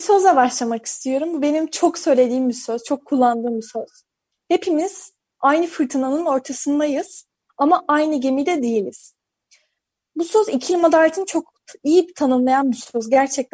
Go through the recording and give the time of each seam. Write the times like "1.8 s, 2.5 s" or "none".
none